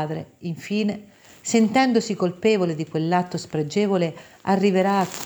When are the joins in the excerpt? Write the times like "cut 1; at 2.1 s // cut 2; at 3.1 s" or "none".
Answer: none